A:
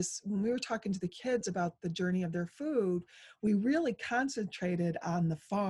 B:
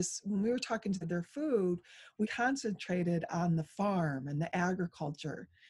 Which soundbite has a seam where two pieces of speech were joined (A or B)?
B